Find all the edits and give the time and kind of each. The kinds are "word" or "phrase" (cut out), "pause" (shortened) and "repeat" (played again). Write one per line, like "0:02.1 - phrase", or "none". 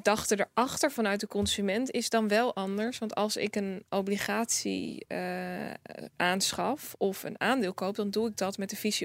none